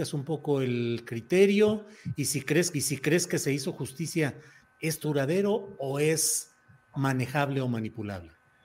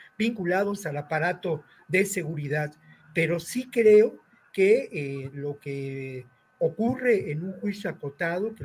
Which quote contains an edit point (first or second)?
first